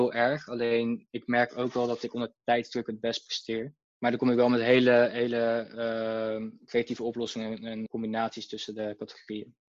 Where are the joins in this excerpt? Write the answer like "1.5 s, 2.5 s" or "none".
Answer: 7.9 s